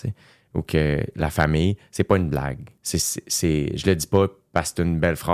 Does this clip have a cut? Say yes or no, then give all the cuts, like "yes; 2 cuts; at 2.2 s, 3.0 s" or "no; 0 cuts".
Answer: yes; 1 cut; at 2.8 s